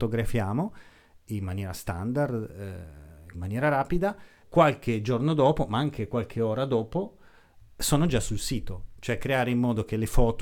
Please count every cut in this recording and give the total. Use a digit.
2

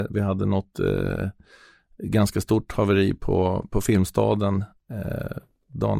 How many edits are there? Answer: 0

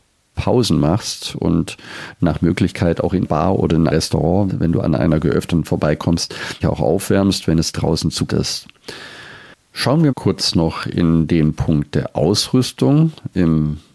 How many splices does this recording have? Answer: 6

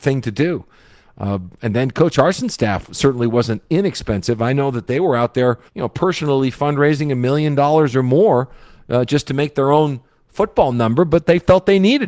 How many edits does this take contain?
1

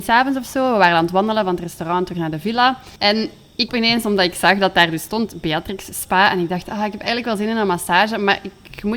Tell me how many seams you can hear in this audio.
2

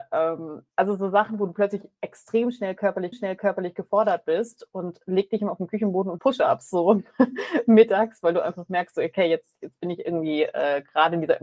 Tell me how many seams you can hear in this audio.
2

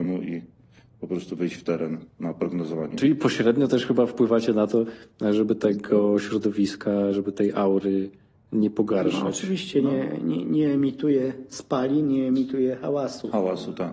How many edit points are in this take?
0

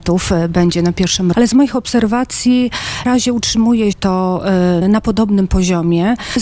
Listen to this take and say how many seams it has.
4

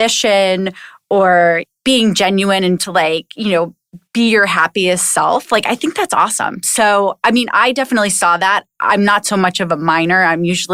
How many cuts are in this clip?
1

